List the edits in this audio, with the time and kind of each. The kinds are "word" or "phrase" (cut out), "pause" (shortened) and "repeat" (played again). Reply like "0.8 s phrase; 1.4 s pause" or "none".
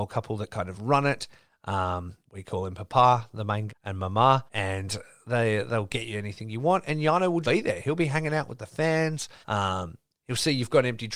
2.2 s pause; 3.7 s word; 4.5 s pause; 7.4 s word; 9.4 s pause